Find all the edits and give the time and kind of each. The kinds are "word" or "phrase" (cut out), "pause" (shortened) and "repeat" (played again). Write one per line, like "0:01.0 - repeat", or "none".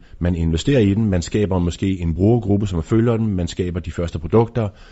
none